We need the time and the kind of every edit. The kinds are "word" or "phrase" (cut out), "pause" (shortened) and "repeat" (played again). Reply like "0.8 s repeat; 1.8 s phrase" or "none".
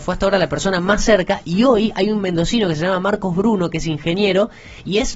none

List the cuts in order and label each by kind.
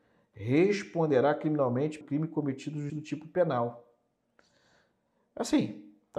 2.0 s word; 2.9 s word

